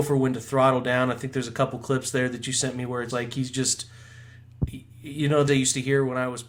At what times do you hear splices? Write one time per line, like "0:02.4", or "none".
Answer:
0:03.1
0:05.5